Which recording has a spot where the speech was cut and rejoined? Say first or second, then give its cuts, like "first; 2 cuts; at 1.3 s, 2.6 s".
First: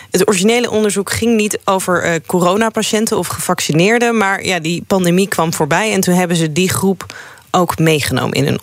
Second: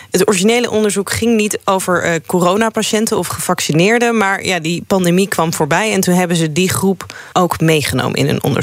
second; 1 cut; at 7.3 s